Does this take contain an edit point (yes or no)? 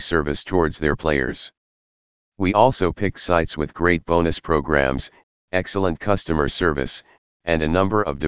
no